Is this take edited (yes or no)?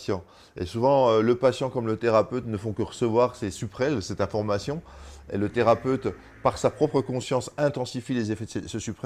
no